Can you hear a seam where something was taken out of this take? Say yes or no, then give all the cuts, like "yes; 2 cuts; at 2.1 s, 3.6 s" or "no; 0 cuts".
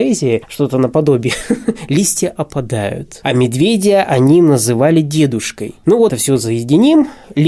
yes; 1 cut; at 6.1 s